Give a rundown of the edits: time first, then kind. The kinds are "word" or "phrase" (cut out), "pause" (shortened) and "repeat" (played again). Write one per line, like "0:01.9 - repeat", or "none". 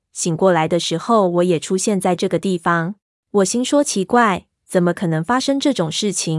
0:03.0 - pause

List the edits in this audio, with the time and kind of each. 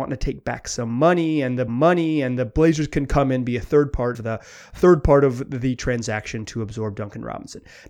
0:01.7 - repeat
0:04.1 - word

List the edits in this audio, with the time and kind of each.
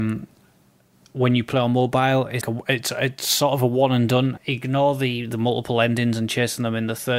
0:02.4 - word
0:04.4 - word

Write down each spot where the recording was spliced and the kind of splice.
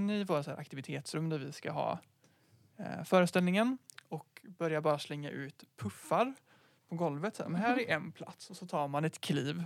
none

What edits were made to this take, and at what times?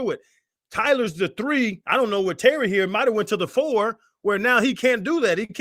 none

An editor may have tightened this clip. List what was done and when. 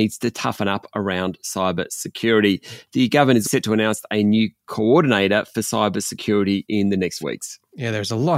0:03.4 - word
0:07.2 - word

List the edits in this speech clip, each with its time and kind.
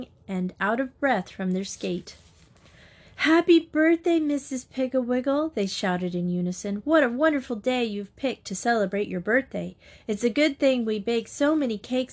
none

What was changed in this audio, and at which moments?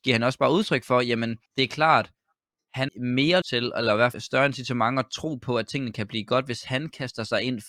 0:01.5 - pause
0:02.9 - word
0:03.4 - word
0:04.1 - word

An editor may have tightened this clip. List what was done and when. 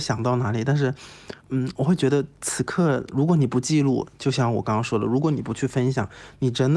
0:01.4 - pause

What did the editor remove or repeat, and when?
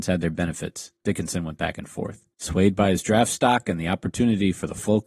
0:01.0 - pause
0:02.3 - pause

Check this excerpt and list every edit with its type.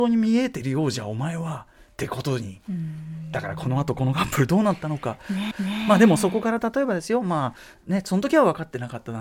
0:05.5 - repeat

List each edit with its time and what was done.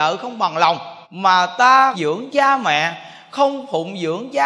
0:01.0 - pause
0:01.9 - phrase

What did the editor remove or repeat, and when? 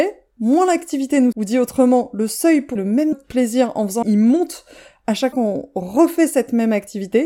0:01.3 - word
0:02.8 - word
0:03.1 - word
0:04.0 - word
0:05.3 - word

